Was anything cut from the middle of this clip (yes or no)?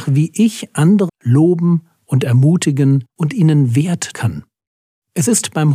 yes